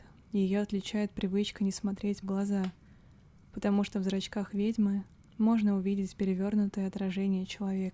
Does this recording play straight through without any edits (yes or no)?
no